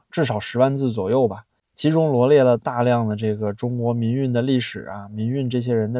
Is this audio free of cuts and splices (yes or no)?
yes